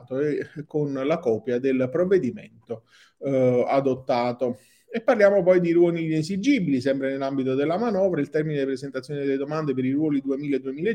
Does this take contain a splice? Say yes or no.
no